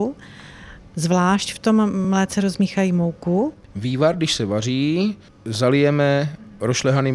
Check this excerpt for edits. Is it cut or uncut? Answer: uncut